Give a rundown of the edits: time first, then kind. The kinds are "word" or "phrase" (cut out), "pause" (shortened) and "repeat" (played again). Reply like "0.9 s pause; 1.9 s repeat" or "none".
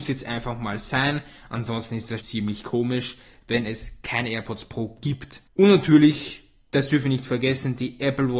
2.2 s word